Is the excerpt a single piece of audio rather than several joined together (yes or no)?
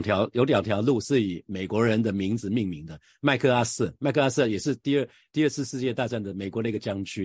no